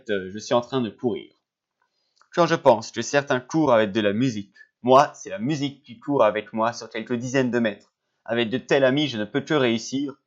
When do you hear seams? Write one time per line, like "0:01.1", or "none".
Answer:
none